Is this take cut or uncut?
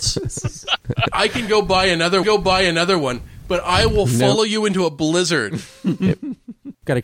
cut